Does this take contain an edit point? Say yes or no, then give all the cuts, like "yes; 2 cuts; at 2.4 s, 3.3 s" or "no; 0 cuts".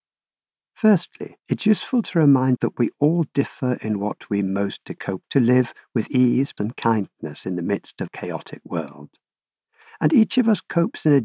yes; 6 cuts; at 1.4 s, 2.6 s, 4.8 s, 5.2 s, 6.6 s, 8.1 s